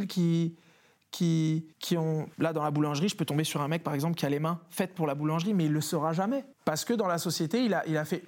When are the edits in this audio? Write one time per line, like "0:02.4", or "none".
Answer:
0:01.7
0:02.3
0:06.5